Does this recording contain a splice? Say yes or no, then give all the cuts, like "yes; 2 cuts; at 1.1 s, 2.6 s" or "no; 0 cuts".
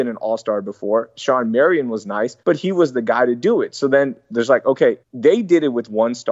yes; 2 cuts; at 2.4 s, 5.0 s